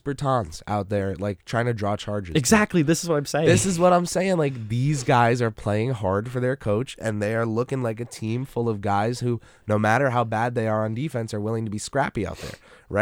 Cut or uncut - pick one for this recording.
uncut